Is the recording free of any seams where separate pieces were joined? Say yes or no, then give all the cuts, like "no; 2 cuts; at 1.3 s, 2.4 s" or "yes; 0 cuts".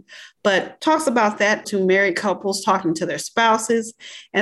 no; 1 cut; at 1.6 s